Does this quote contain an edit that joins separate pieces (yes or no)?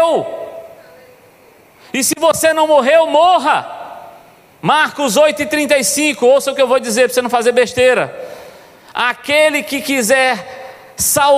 no